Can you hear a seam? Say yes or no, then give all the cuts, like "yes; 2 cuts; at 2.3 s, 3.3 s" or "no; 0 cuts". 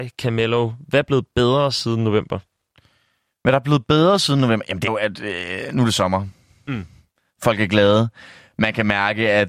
yes; 1 cut; at 4.9 s